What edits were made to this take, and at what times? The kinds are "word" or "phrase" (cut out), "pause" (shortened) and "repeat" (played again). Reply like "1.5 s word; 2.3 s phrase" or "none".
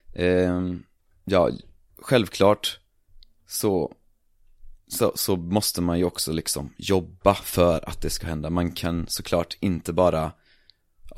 none